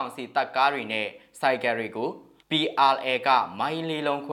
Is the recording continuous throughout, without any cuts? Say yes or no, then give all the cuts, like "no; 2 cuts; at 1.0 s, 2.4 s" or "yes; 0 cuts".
no; 1 cut; at 2.4 s